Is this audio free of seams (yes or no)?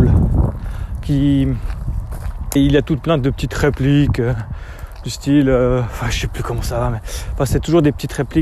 no